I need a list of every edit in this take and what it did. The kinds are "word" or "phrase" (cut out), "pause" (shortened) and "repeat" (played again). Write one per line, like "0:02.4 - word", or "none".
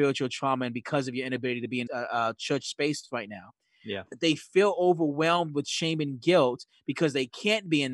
0:01.9 - word